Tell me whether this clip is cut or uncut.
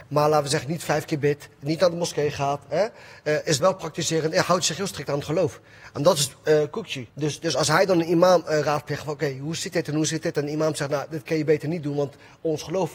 cut